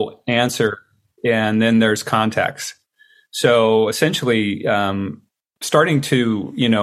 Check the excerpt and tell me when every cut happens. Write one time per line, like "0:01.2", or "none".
none